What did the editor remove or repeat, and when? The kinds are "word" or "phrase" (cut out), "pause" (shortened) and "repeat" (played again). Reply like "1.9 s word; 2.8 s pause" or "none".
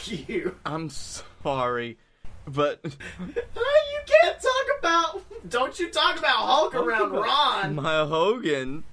none